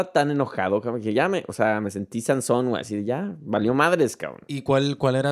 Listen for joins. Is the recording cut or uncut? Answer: uncut